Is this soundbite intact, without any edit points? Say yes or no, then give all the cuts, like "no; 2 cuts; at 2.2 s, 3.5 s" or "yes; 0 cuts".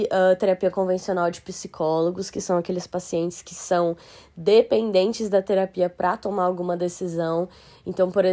yes; 0 cuts